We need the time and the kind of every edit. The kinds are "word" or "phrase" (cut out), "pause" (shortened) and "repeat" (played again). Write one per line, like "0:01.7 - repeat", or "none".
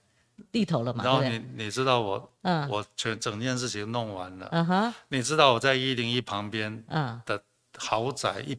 none